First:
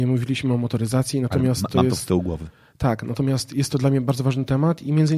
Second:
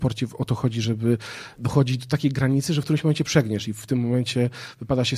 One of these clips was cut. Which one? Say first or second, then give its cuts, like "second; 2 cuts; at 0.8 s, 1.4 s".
second; 1 cut; at 1.5 s